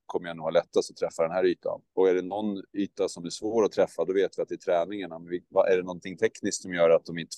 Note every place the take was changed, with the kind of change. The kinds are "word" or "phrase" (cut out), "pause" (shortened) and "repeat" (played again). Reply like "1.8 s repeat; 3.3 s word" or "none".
1.9 s pause; 2.7 s pause